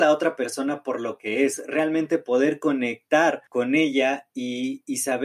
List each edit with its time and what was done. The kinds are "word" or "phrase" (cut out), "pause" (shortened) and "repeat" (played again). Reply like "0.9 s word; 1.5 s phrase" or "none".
3.5 s pause